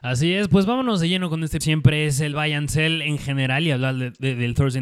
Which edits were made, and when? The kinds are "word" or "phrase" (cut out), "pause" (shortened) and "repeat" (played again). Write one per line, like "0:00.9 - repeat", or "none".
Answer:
0:01.6 - phrase